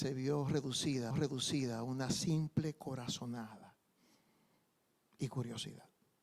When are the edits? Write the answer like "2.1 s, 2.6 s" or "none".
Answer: 1.1 s